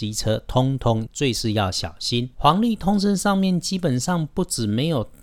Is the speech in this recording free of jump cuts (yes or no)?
no